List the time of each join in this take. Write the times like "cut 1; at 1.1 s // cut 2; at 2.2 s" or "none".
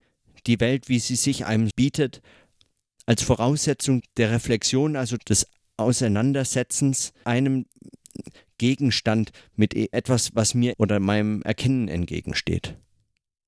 cut 1; at 1.7 s // cut 2; at 4.0 s // cut 3; at 5.2 s // cut 4; at 7.2 s // cut 5; at 9.9 s // cut 6; at 10.7 s